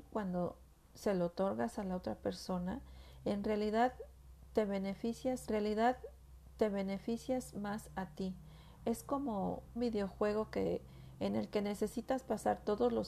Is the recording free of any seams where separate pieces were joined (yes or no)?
no